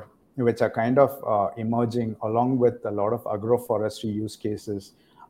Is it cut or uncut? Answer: uncut